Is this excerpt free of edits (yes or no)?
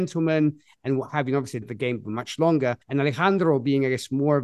no